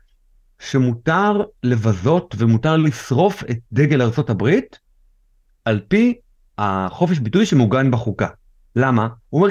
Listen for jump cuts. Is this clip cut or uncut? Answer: uncut